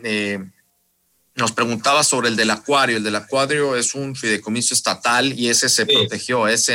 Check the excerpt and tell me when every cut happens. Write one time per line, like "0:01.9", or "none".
none